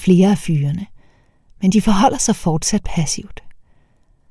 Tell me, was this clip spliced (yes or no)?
no